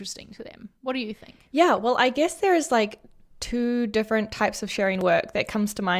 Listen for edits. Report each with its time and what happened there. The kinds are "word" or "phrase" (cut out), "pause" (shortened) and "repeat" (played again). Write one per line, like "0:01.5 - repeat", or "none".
none